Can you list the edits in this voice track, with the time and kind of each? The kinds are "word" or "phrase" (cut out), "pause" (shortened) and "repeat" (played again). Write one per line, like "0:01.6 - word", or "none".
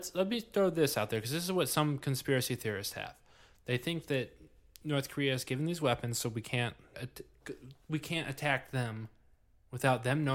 0:06.9 - word